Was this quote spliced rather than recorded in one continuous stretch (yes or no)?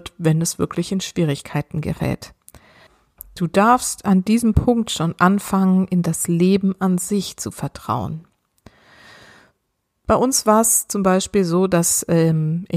no